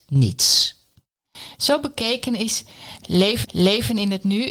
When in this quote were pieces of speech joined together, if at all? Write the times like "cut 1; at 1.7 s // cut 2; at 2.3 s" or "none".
cut 1; at 3.4 s